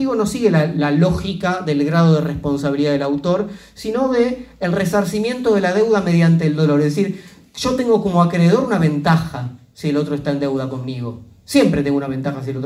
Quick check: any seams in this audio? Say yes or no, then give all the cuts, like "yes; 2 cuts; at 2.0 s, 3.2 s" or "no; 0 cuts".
no; 0 cuts